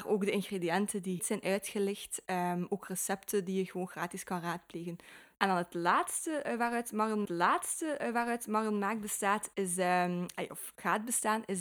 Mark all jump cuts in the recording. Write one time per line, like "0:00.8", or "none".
0:01.2
0:07.3